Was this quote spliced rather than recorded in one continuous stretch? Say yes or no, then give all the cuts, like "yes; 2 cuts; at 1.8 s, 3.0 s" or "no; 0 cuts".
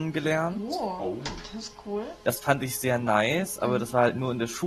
no; 0 cuts